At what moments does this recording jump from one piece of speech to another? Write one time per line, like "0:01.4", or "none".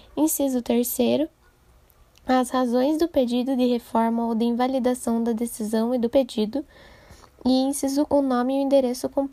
0:06.1
0:08.1